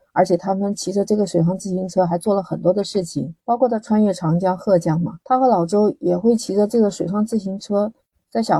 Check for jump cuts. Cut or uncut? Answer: cut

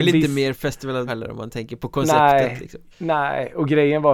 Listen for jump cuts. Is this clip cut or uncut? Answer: cut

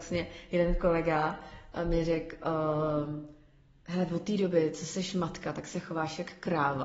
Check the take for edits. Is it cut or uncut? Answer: uncut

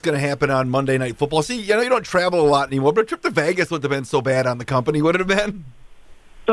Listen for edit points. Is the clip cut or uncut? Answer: uncut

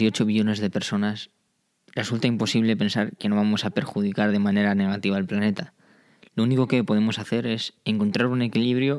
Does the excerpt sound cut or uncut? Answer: uncut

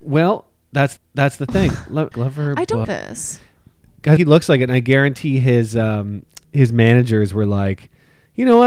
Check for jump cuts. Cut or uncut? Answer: cut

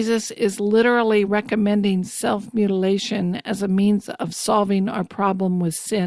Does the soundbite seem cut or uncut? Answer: uncut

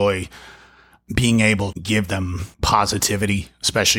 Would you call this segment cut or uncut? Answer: cut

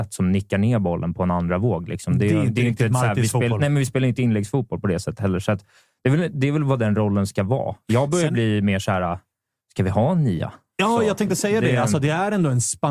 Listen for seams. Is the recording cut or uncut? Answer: uncut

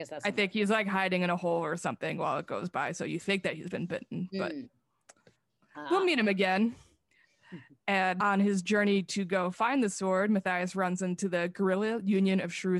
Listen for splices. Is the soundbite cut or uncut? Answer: uncut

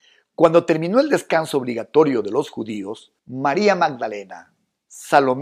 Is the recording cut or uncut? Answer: cut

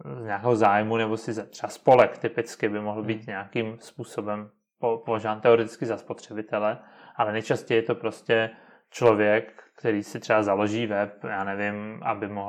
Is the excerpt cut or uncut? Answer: uncut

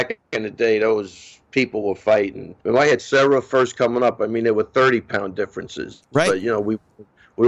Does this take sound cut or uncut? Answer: cut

